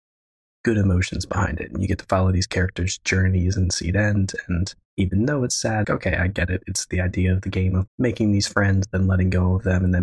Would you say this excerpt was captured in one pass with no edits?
no; 3 cuts; at 4.8 s, 5.8 s, 7.9 s

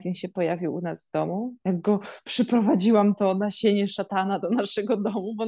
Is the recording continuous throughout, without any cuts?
yes; 0 cuts

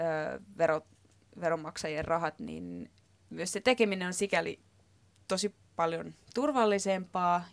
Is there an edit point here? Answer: no; 0 cuts

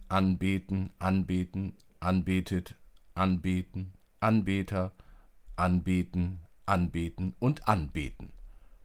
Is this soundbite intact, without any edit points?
yes; 0 cuts

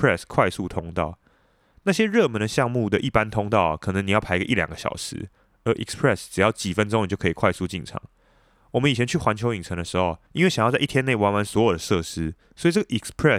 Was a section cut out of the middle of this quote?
no; 0 cuts

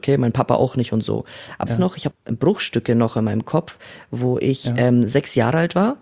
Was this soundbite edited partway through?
yes; 2 cuts; at 1.7 s, 2.1 s

